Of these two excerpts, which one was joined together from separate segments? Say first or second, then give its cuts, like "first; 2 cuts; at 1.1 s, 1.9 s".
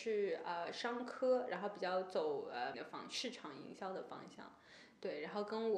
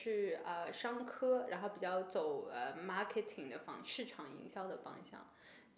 first; 1 cut; at 2.7 s